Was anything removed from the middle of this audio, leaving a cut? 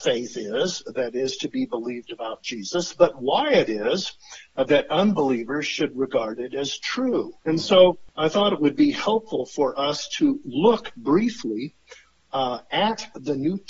yes; 1 cut; at 7.4 s

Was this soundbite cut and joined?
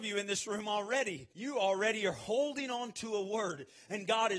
yes; 1 cut; at 1.3 s

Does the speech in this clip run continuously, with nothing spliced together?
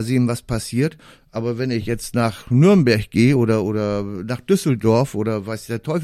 yes; 0 cuts

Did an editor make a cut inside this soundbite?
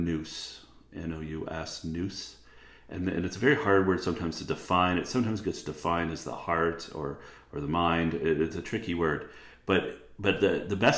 no; 0 cuts

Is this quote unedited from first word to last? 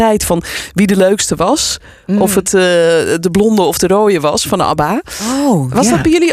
yes; 0 cuts

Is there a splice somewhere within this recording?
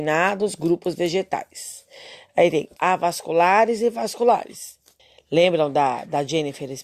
yes; 2 cuts; at 2.8 s, 5.0 s

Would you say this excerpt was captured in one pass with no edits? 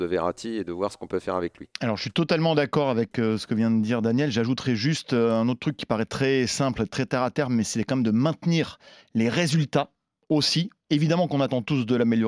yes; 0 cuts

